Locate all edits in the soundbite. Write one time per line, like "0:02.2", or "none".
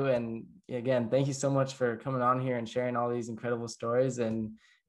none